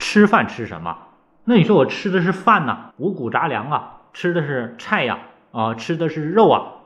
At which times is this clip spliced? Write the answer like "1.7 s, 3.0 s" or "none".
2.9 s